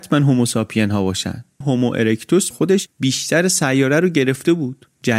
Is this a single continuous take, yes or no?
no